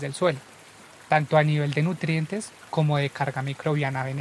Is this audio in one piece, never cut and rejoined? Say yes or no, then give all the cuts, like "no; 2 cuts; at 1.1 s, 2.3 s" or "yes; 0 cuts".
yes; 0 cuts